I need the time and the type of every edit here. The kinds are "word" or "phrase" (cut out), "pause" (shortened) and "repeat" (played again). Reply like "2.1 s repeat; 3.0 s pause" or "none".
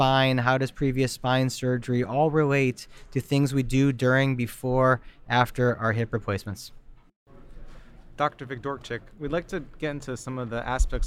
none